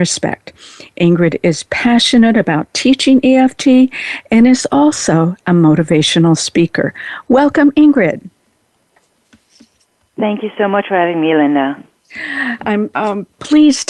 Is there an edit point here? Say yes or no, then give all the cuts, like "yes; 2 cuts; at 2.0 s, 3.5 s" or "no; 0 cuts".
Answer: yes; 1 cut; at 12.9 s